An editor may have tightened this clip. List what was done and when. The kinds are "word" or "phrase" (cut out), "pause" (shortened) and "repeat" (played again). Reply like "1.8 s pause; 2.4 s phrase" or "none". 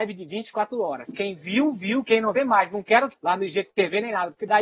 2.4 s phrase; 3.1 s word